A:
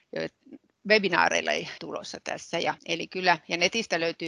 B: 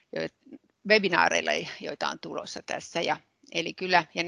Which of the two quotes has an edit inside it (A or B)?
A